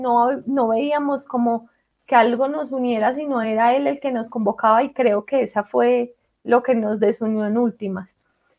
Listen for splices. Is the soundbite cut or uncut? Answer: uncut